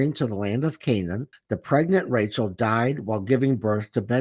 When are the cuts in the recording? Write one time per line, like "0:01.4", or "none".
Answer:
0:01.3